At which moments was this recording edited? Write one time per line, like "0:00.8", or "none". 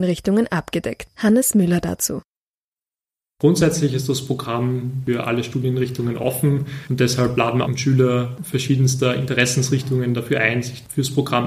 0:07.7